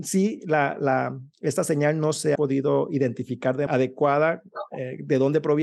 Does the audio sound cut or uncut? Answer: cut